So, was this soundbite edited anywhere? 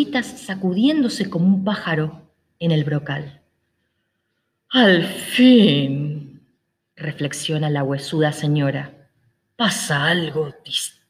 no; 0 cuts

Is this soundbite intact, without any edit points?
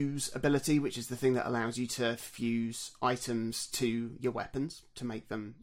yes; 0 cuts

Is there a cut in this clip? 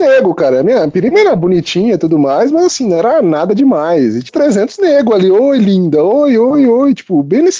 yes; 1 cut; at 4.3 s

